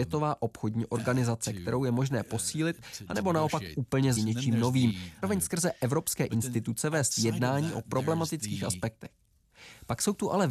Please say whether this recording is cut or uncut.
cut